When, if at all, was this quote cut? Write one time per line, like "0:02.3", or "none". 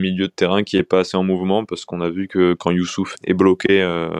0:03.1